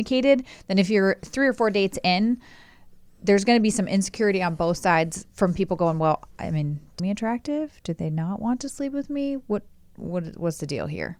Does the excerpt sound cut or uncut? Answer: cut